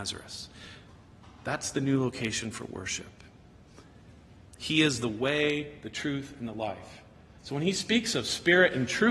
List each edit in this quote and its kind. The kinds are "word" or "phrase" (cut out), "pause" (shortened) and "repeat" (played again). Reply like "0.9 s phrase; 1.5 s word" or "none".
none